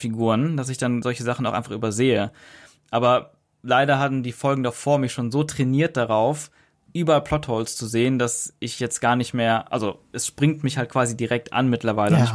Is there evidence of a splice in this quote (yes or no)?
no